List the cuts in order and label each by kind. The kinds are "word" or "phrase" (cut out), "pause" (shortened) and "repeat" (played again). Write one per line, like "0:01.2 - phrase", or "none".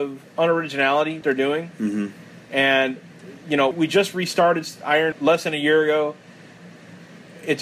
0:01.2 - word
0:03.7 - word
0:05.1 - word